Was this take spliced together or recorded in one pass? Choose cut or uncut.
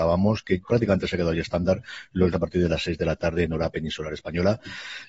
cut